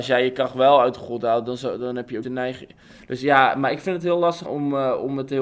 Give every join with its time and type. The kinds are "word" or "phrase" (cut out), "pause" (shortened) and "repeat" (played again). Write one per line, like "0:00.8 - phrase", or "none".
0:02.2 - word
0:04.4 - word